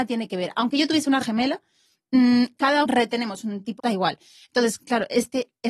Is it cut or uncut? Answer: cut